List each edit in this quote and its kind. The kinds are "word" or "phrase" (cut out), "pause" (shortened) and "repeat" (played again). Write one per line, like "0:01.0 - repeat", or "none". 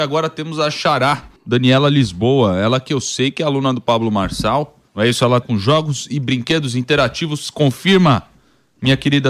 0:01.4 - pause
0:04.9 - pause
0:05.4 - word